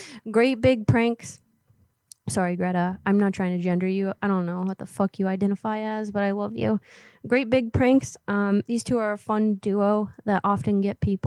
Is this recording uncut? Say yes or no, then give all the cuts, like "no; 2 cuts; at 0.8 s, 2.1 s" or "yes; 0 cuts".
yes; 0 cuts